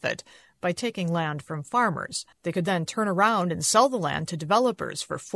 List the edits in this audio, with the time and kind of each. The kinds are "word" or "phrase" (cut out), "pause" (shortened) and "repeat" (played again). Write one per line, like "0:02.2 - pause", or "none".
0:02.3 - pause